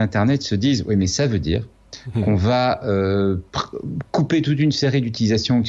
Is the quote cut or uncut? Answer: uncut